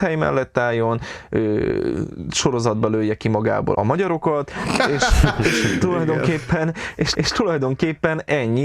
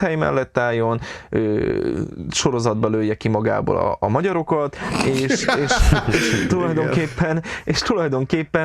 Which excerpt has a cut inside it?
first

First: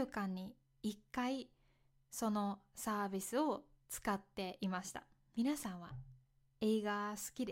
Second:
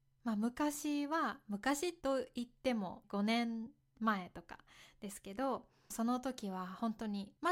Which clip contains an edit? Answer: second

